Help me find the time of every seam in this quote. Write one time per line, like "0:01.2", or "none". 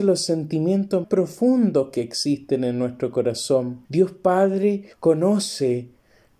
0:01.0
0:03.8
0:04.9

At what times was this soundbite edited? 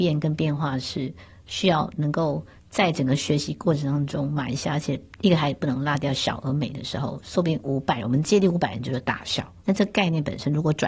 0:09.6

